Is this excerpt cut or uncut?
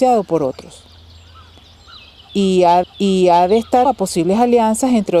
cut